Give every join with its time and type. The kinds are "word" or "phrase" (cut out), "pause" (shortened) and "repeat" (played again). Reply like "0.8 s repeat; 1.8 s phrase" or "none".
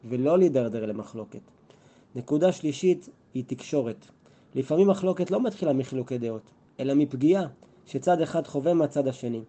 none

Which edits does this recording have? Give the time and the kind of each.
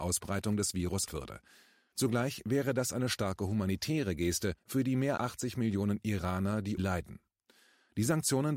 1.1 s word; 4.6 s pause; 5.2 s word; 6.8 s phrase

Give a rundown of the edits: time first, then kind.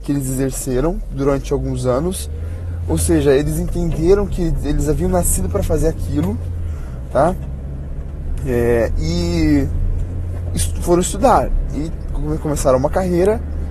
none

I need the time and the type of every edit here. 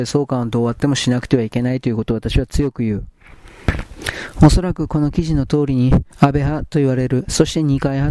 6.1 s pause

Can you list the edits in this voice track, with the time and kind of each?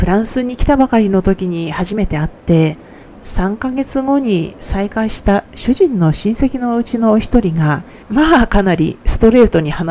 8.0 s pause

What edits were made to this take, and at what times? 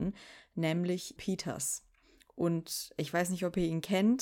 1.2 s word

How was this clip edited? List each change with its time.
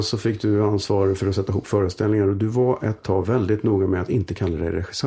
none

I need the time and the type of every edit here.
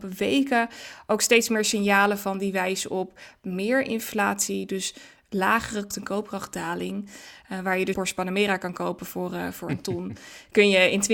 5.9 s word; 7.9 s phrase

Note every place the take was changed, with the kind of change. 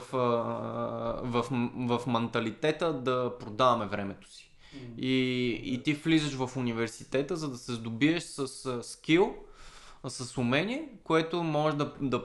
none

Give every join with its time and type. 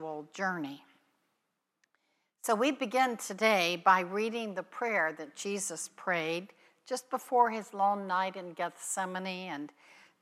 none

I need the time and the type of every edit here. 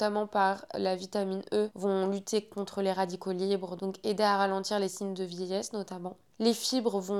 none

